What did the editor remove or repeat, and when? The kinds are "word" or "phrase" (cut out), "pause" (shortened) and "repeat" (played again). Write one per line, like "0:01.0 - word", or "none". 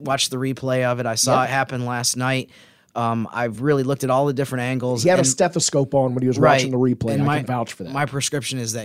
none